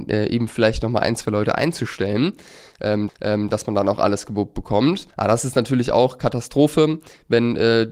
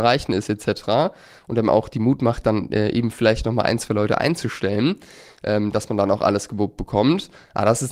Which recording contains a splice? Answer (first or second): first